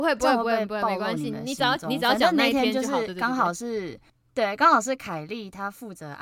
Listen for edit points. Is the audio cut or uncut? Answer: cut